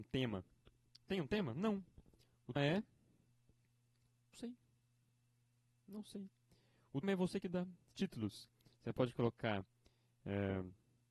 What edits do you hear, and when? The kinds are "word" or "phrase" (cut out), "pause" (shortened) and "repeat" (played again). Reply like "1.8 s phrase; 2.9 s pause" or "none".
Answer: 2.6 s word; 4.3 s word; 7.0 s word; 7.9 s phrase